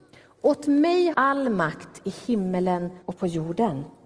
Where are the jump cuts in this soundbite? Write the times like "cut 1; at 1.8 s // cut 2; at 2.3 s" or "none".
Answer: cut 1; at 1.1 s // cut 2; at 3.0 s